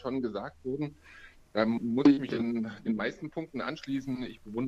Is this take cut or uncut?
uncut